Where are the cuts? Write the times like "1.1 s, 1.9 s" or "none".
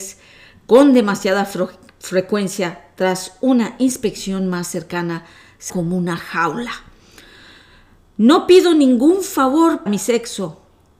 5.7 s, 9.9 s